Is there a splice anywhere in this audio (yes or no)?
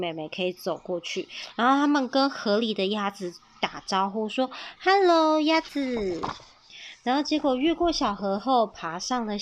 no